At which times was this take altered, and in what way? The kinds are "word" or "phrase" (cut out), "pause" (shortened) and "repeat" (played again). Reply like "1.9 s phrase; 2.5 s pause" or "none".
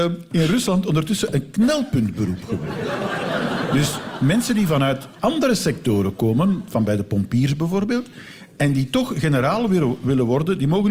none